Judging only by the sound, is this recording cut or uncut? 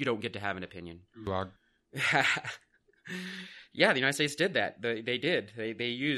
cut